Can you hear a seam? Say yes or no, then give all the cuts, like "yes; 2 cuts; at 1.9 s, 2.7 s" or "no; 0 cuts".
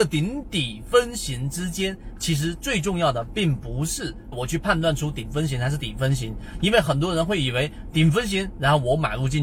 yes; 1 cut; at 4.3 s